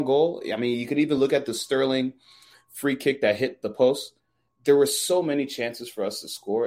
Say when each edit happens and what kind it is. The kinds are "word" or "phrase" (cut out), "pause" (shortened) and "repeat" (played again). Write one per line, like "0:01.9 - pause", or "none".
none